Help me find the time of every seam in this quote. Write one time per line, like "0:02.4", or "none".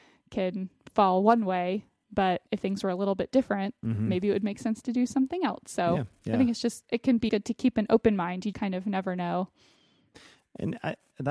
0:02.5
0:07.3
0:08.5